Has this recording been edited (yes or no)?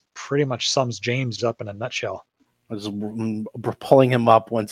yes